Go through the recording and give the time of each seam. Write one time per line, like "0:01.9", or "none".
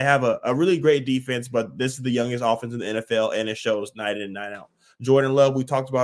none